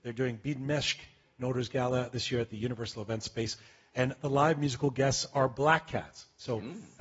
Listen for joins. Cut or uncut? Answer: uncut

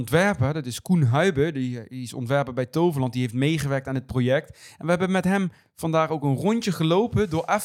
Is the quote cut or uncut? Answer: uncut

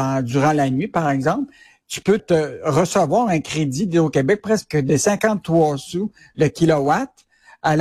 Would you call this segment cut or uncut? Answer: cut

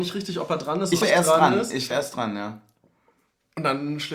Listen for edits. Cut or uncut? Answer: cut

